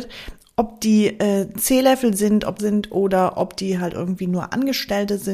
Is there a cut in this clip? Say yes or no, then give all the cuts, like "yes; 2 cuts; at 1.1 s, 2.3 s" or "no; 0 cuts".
yes; 1 cut; at 2.6 s